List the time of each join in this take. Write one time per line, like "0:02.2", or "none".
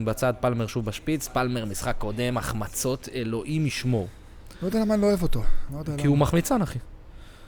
none